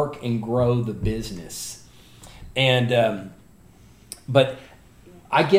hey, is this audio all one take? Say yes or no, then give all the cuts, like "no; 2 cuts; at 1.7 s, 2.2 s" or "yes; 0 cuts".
yes; 0 cuts